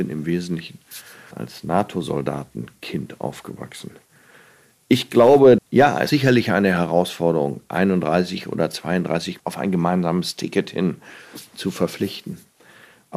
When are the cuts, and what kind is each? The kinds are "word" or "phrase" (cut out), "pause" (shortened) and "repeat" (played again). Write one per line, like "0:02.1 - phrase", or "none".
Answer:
0:01.3 - word
0:05.6 - word
0:06.1 - word
0:09.4 - word